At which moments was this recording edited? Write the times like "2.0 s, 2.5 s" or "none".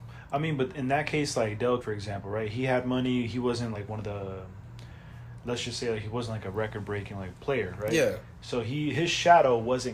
1.8 s, 3.7 s